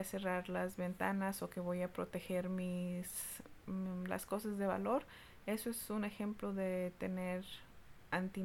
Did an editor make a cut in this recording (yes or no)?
no